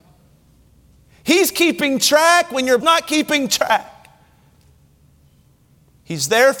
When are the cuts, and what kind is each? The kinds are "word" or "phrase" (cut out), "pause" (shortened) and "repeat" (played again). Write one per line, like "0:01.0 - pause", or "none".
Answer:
0:02.8 - phrase